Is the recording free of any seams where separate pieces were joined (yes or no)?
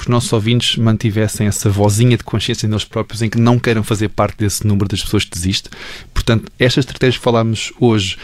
yes